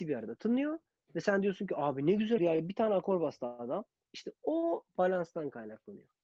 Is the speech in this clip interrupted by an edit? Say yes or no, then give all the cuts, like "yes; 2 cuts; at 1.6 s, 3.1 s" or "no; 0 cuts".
yes; 1 cut; at 2.4 s